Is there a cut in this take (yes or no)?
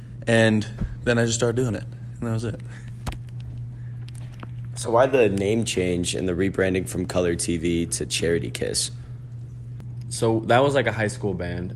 no